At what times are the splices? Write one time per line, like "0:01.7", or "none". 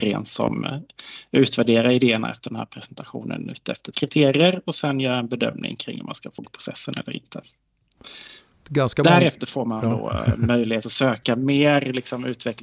0:03.9
0:06.4
0:08.5